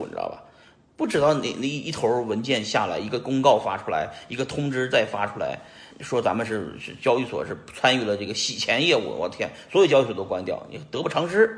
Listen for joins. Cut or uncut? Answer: cut